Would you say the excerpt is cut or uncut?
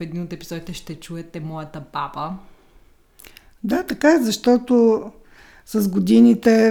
uncut